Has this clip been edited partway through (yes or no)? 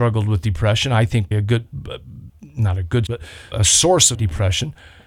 yes